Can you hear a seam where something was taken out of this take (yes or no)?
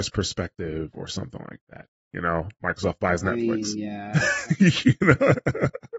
no